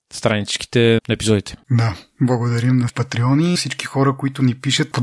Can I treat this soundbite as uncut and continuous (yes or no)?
no